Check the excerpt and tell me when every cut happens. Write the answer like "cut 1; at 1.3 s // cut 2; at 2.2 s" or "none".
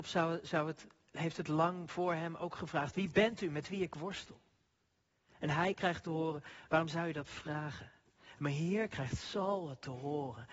none